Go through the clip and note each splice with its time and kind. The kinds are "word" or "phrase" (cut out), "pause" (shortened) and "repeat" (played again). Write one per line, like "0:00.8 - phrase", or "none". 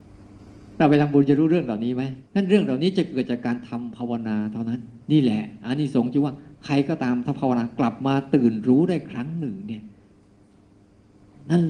0:02.3 - pause
0:05.0 - pause